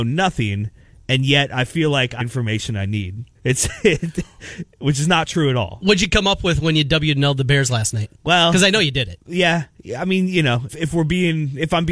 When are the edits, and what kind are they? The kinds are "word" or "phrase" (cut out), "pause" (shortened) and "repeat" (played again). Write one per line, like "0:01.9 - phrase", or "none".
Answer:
0:02.2 - phrase
0:03.3 - pause
0:08.1 - pause
0:10.7 - word